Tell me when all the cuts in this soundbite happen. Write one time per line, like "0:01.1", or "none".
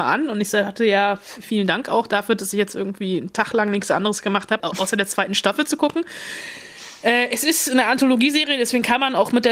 0:04.6